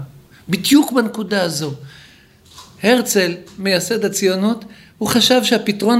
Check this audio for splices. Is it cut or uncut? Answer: uncut